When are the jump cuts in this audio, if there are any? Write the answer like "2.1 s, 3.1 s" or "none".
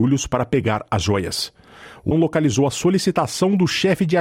2.1 s